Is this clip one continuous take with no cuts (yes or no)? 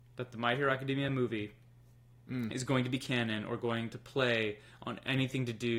yes